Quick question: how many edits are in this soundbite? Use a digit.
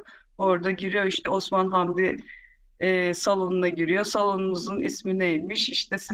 0